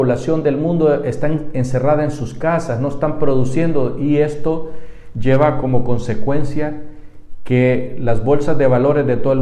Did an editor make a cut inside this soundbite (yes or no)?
no